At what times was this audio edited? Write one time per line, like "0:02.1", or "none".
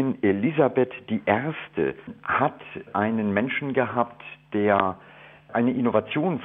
none